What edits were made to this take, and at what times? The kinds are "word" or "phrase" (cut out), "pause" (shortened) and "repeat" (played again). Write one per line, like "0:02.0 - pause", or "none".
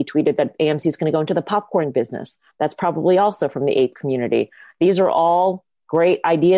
none